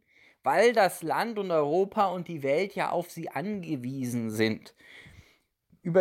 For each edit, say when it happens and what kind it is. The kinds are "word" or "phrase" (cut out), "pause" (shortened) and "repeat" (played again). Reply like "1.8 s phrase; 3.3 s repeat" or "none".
none